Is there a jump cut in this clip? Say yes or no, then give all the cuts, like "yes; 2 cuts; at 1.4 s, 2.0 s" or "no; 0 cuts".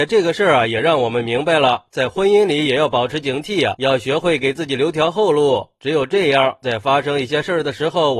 yes; 1 cut; at 3.7 s